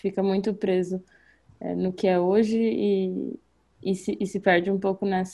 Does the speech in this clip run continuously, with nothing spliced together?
yes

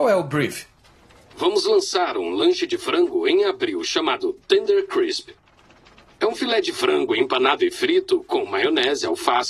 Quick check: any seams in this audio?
no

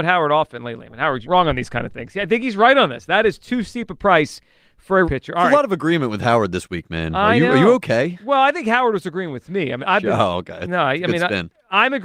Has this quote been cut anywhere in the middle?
yes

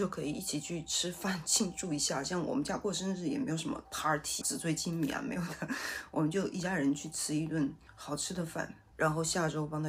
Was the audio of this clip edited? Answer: yes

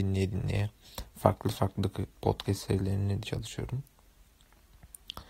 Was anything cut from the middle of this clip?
yes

